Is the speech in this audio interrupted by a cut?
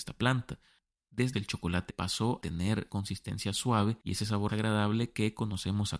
yes; 5 cuts; at 1.3 s, 1.9 s, 2.4 s, 2.9 s, 4.5 s

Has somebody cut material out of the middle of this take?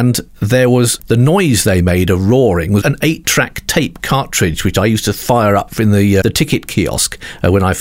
yes; 3 cuts; at 1.0 s, 2.8 s, 6.2 s

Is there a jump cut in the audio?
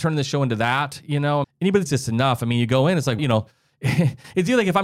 yes; 3 cuts; at 1.4 s, 1.9 s, 3.2 s

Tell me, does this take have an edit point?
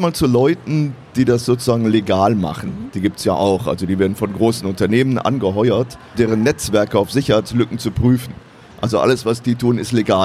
yes; 1 cut; at 6.1 s

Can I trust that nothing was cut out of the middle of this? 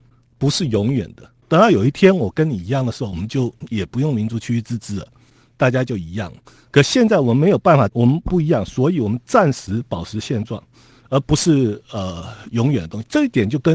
no; 1 cut; at 1.4 s

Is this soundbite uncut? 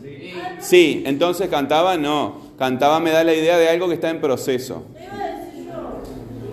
yes; 0 cuts

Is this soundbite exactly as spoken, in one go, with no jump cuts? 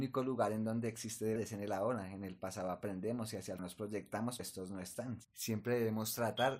no; 3 cuts; at 1.4 s, 3.6 s, 4.4 s

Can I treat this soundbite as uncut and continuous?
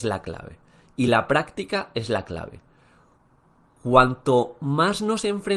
yes; 0 cuts

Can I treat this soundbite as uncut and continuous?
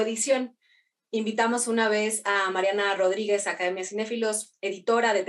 yes; 0 cuts

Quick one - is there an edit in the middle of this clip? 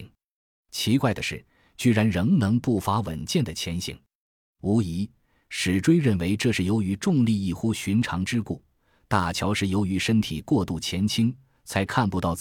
no; 0 cuts

